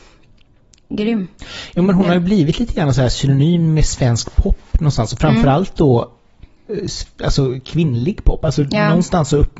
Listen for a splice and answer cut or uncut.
uncut